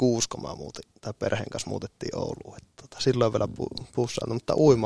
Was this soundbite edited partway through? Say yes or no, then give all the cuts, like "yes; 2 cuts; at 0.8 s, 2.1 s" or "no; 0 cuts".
no; 0 cuts